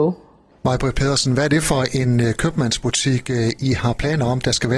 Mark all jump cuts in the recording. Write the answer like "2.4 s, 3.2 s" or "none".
none